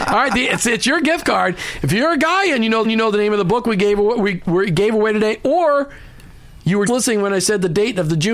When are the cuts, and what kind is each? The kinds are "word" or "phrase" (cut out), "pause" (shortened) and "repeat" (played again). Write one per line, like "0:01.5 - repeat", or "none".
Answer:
0:02.8 - repeat
0:06.9 - word